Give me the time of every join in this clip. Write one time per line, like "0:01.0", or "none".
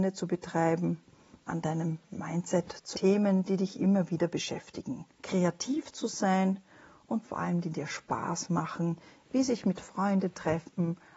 0:01.5
0:02.9
0:05.1
0:07.2